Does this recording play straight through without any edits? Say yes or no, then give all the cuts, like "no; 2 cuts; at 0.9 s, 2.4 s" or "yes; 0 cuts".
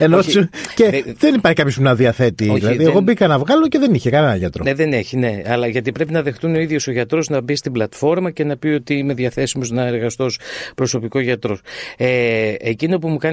yes; 0 cuts